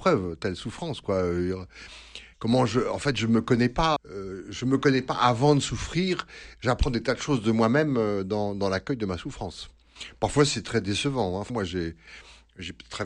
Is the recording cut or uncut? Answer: cut